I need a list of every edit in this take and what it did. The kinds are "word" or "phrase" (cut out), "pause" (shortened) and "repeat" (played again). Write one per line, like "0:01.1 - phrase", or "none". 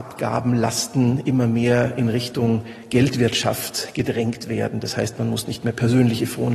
none